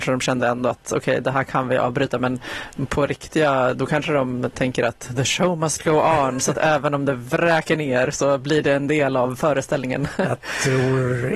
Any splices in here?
no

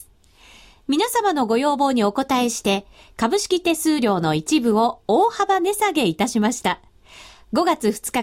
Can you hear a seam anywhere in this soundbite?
no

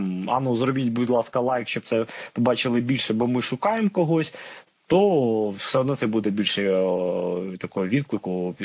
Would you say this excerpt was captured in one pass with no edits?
yes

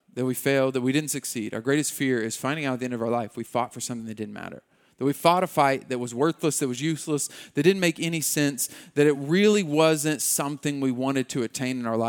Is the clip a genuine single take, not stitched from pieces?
yes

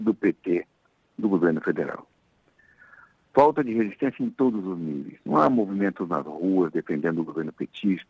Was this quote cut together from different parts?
no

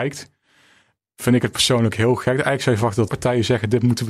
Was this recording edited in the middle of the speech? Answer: yes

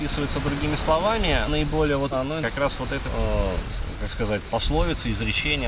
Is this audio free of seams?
no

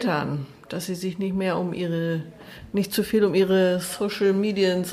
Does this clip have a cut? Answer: no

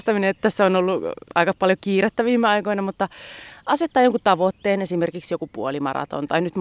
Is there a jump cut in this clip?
yes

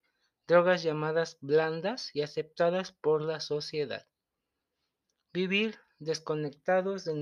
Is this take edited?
no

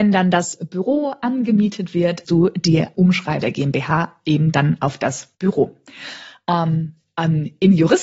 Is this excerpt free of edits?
no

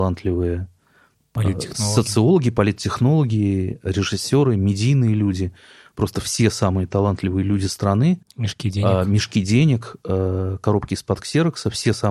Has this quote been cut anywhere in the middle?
no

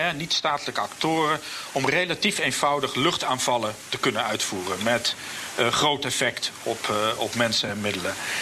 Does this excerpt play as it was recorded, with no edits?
yes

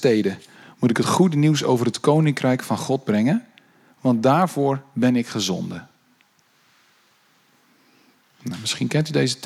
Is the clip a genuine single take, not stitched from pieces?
yes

